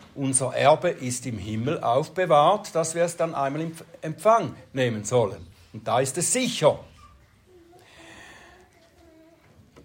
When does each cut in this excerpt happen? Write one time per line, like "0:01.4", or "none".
none